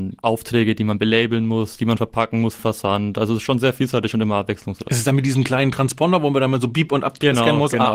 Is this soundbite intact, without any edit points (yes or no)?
no